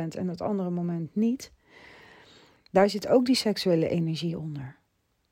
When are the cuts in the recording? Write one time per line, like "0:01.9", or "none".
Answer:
none